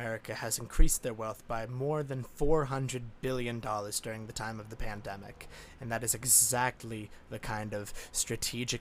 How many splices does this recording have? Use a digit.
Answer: 0